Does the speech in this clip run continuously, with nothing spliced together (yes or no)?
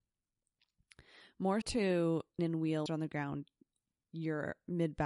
no